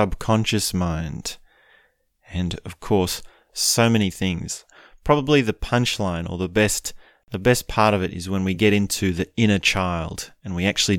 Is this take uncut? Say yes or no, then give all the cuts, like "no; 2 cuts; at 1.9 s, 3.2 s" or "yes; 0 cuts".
yes; 0 cuts